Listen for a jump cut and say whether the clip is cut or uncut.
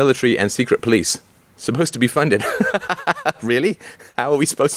uncut